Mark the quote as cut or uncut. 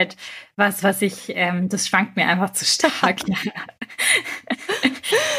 uncut